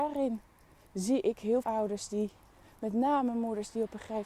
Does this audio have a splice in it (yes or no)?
yes